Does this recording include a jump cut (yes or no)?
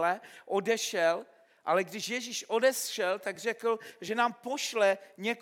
no